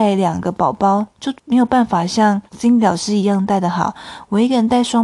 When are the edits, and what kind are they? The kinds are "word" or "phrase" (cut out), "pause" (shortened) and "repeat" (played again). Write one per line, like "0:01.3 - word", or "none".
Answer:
0:01.4 - pause
0:02.5 - pause